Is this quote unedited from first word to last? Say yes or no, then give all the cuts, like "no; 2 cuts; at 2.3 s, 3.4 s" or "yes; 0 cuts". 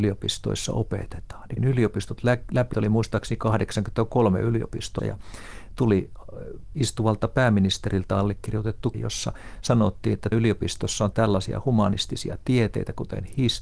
no; 6 cuts; at 1.6 s, 2.7 s, 5.0 s, 8.9 s, 10.3 s, 11.1 s